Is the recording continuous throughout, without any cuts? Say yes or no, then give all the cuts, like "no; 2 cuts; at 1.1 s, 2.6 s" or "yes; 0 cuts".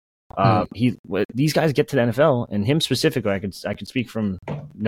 yes; 0 cuts